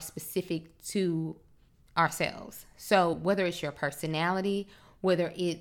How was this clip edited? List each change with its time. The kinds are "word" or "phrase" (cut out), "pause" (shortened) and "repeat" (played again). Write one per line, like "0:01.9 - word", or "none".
none